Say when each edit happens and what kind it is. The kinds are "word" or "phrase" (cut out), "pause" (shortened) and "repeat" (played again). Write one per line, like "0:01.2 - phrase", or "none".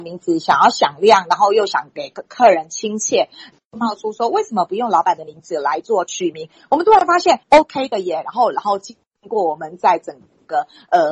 0:07.4 - pause